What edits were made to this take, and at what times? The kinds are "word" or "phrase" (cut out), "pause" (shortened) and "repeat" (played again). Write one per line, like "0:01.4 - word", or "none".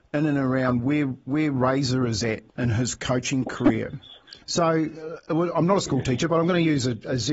0:02.5 - pause
0:04.4 - pause